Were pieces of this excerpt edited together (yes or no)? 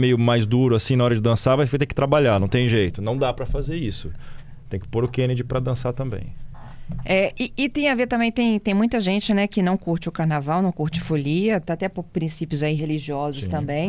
no